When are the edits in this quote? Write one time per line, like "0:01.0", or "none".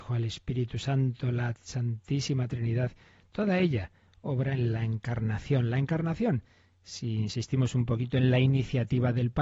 none